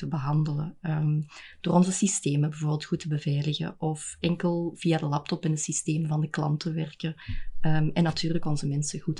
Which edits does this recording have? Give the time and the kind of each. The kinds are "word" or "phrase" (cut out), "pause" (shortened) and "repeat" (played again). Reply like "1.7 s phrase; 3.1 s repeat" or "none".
none